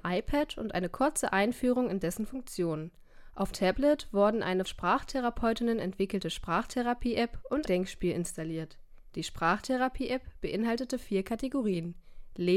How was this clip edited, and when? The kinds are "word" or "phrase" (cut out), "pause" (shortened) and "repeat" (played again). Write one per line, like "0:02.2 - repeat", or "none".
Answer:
0:03.5 - word
0:04.6 - word
0:07.7 - word

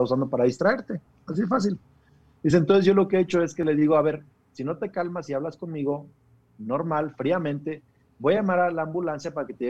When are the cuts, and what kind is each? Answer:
none

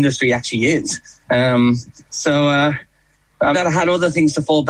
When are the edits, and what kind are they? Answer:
0:03.5 - phrase

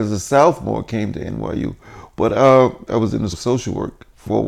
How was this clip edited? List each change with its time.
0:02.9 - word
0:03.3 - word

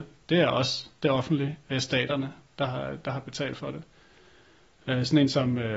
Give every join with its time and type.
none

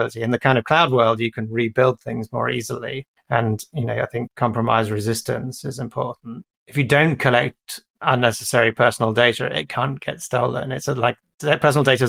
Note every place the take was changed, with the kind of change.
0:03.2 - pause
0:06.5 - pause

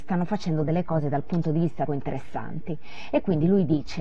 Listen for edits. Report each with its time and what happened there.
0:01.9 - word

